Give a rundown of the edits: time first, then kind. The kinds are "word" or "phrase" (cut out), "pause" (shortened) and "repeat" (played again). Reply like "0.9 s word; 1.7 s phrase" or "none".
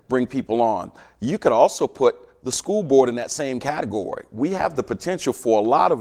none

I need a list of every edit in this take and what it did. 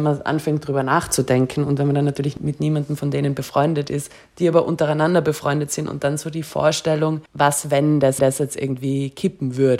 7.3 s pause; 8.2 s repeat

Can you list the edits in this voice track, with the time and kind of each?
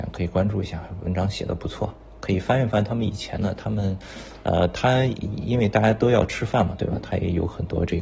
none

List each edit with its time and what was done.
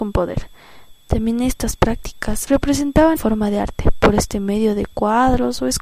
2.5 s word; 3.2 s word

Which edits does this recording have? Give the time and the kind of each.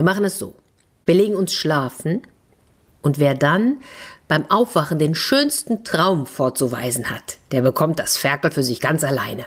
none

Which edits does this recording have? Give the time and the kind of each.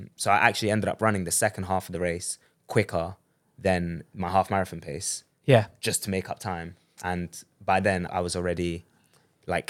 8.1 s word

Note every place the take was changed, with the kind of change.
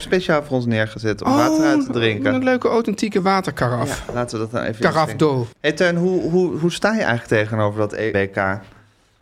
5.5 s pause; 8.1 s word

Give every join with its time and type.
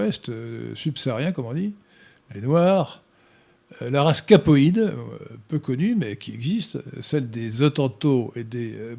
none

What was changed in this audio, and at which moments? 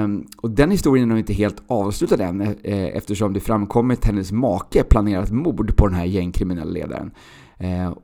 4.0 s word

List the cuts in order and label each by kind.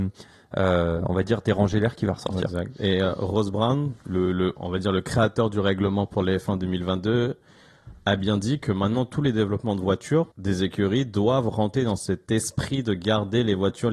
4.3 s word; 10.3 s pause

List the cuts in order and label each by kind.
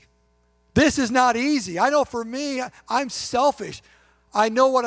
none

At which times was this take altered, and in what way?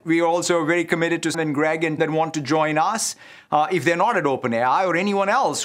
1.3 s word; 2.0 s word

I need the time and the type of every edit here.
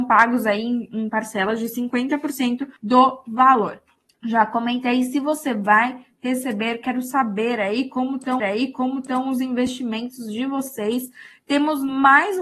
2.8 s pause; 4.0 s pause; 8.4 s repeat

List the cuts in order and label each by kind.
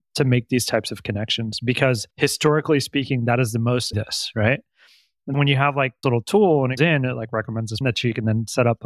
2.1 s pause; 3.9 s phrase; 5.3 s word; 6.0 s word; 6.8 s word; 7.8 s word

